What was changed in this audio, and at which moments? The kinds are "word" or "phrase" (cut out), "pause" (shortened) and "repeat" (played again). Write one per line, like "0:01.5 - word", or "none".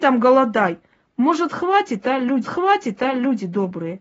0:02.4 - repeat